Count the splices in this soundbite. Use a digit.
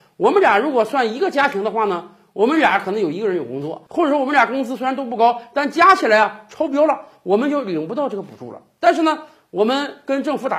0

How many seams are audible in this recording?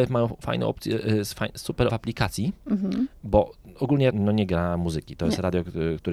2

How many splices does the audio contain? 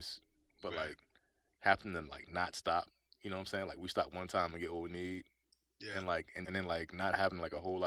1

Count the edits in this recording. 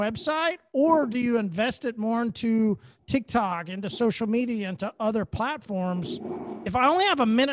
0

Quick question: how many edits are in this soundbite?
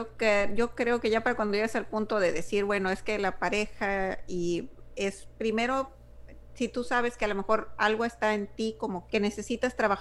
1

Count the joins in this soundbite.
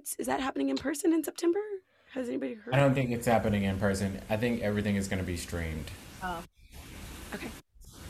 0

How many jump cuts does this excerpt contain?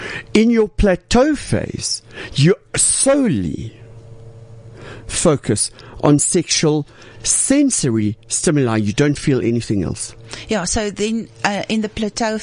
0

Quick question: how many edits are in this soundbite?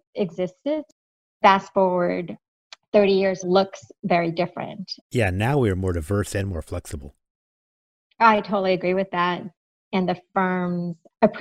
2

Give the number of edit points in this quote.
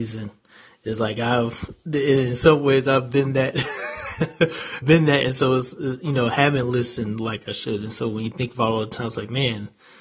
1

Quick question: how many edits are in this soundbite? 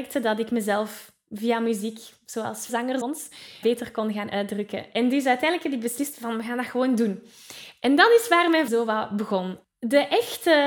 4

